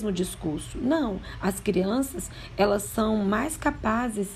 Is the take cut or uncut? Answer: uncut